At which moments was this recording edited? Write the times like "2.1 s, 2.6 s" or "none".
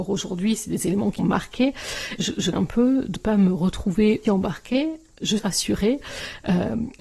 1.2 s, 2.2 s, 2.5 s, 3.2 s, 4.2 s, 5.4 s